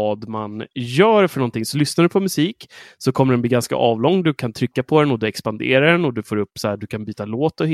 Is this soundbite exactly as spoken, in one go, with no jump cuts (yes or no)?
yes